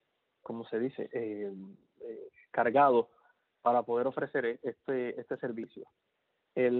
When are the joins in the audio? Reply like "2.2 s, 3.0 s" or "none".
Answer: none